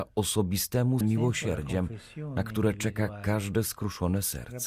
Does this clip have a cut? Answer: yes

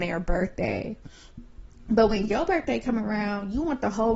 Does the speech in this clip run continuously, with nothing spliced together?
yes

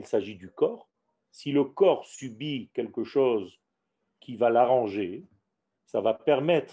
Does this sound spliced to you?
no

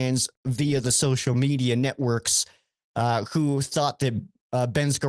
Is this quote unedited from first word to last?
yes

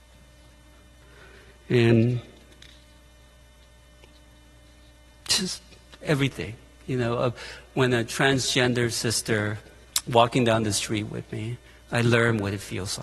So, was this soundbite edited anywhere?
no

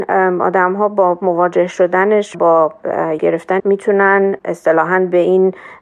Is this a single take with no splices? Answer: no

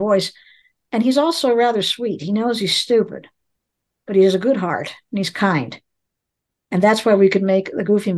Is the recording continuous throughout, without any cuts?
yes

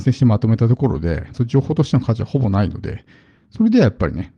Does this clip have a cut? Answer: yes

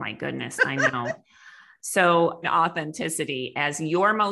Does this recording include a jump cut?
yes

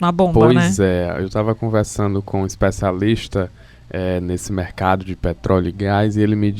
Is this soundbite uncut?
yes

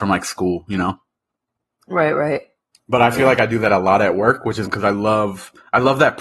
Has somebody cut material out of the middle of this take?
yes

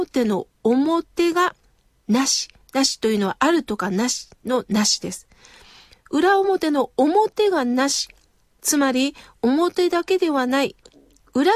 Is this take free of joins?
yes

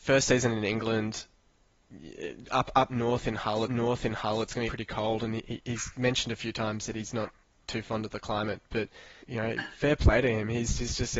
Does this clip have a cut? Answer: yes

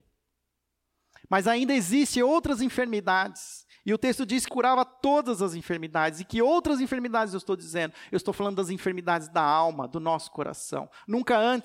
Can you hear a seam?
yes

